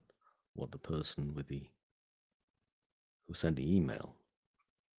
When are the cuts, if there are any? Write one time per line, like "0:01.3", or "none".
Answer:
0:03.6